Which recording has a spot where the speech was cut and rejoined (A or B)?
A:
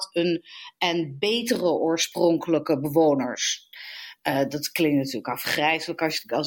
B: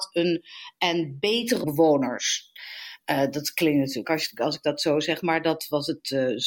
B